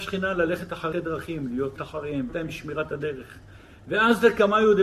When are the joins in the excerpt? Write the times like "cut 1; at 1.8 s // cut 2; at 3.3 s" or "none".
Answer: cut 1; at 0.9 s // cut 2; at 1.8 s // cut 3; at 2.3 s